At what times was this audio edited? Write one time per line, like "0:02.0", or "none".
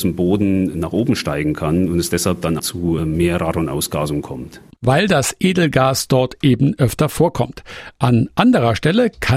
0:02.6
0:03.0